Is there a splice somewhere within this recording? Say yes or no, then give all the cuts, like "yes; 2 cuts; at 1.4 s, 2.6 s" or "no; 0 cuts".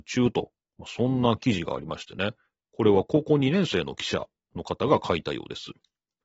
no; 0 cuts